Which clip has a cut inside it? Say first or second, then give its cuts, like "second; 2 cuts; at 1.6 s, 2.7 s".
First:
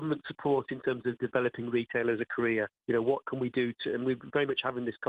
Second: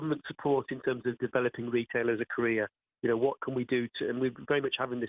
first; 1 cut; at 2.7 s